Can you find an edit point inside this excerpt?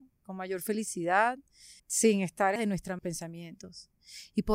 yes; 3 cuts; at 1.8 s, 2.6 s, 3.0 s

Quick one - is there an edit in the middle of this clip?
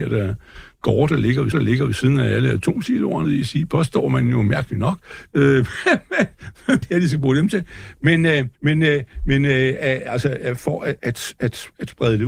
yes; 5 cuts; at 1.5 s, 3.2 s, 6.8 s, 8.5 s, 11.0 s

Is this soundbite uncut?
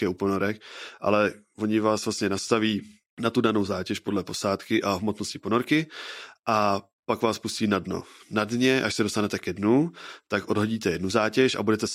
yes; 0 cuts

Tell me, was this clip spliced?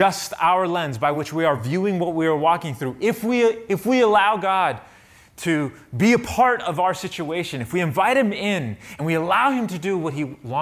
no; 0 cuts

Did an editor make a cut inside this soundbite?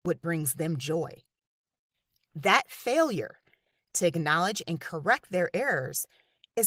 no; 0 cuts

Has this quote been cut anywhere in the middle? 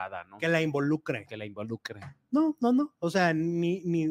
no; 0 cuts

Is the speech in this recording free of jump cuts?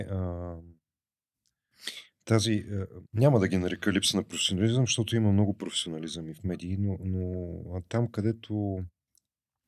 no; 1 cut; at 3.1 s

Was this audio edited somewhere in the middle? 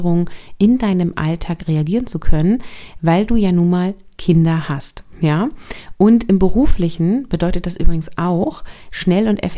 no; 0 cuts

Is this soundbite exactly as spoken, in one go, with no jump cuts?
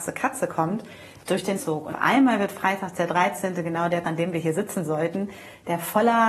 no; 3 cuts; at 1.6 s, 1.9 s, 4.0 s

